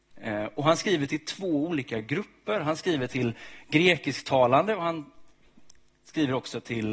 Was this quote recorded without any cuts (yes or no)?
yes